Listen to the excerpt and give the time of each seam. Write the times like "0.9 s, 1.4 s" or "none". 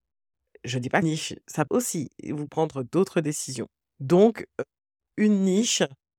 1.0 s, 1.7 s, 2.5 s, 3.8 s